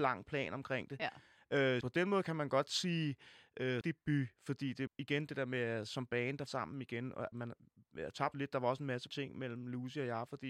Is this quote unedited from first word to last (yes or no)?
no